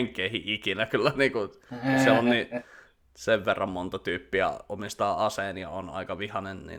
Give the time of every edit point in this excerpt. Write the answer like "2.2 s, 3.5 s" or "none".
none